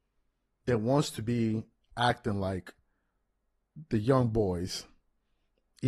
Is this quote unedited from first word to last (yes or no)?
yes